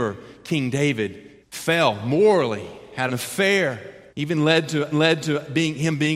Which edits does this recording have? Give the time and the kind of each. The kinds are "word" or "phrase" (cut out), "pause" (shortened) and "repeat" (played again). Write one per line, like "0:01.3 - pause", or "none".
0:01.4 - pause
0:03.1 - word
0:04.1 - pause
0:04.9 - repeat